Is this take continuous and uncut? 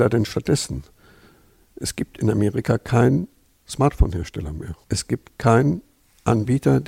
yes; 0 cuts

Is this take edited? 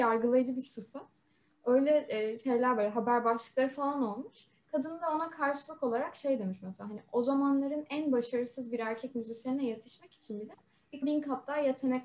yes; 1 cut; at 11.0 s

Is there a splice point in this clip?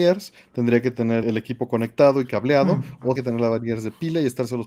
yes; 2 cuts; at 1.2 s, 3.2 s

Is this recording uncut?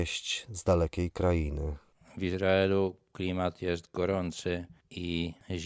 yes; 0 cuts

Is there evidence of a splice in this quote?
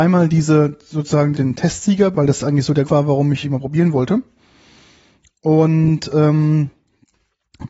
yes; 4 cuts; at 1.3 s, 2.1 s, 2.9 s, 3.4 s

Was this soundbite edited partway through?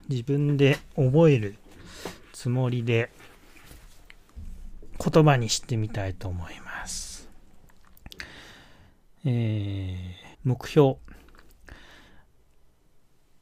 yes; 1 cut; at 10.3 s

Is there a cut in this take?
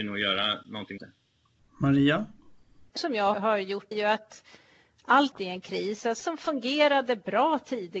yes; 6 cuts; at 1.0 s, 3.0 s, 3.3 s, 3.9 s, 5.3 s, 6.2 s

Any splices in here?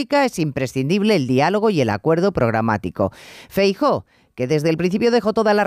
no; 0 cuts

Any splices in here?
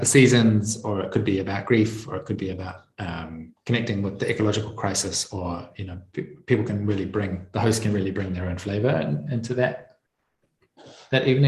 no; 0 cuts

